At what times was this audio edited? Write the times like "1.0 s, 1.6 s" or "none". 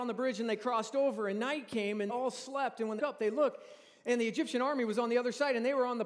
2.1 s, 3.0 s